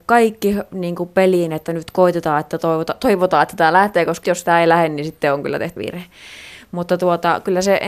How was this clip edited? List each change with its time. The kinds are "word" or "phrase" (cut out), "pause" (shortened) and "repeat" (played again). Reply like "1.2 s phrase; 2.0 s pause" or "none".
4.2 s word; 5.8 s word